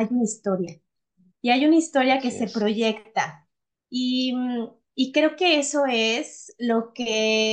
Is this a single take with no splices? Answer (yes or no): yes